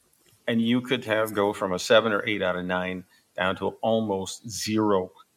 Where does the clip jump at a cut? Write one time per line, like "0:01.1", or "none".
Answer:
none